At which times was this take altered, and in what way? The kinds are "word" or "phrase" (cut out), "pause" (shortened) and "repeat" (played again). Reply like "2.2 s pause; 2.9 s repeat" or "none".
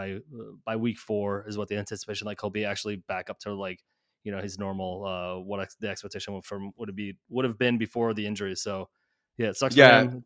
none

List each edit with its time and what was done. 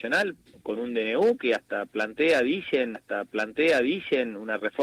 2.9 s repeat

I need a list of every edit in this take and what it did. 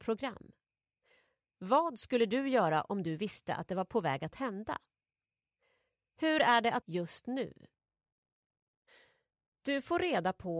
6.8 s phrase

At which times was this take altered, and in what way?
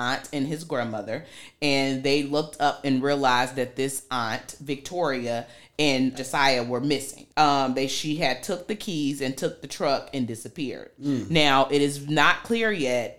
6.1 s word; 7.3 s pause

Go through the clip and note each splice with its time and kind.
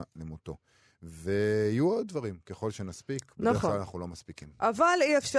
none

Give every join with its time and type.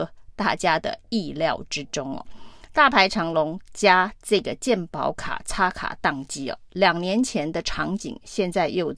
none

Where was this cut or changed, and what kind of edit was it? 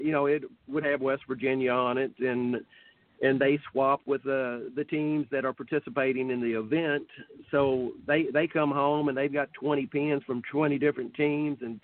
none

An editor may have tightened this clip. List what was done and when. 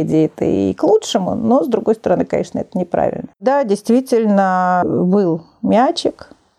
3.3 s pause

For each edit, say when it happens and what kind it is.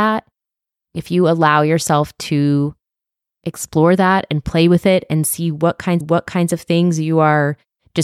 6.0 s repeat

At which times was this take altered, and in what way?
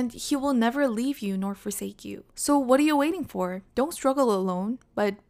2.3 s pause; 3.7 s pause

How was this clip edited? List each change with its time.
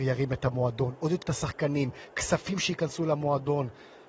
1.2 s word

